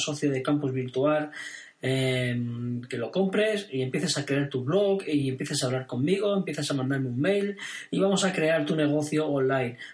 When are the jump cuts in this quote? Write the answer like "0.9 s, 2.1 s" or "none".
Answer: none